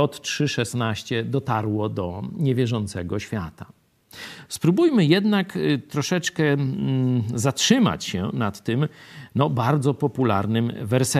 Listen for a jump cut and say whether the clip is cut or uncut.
uncut